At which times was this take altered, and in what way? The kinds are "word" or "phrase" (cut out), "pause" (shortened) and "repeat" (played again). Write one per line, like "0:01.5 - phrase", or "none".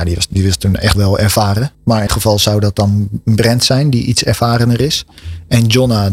0:00.9 - word
0:01.7 - pause
0:02.1 - word

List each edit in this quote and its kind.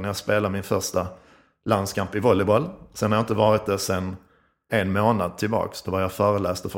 0:04.7 - word

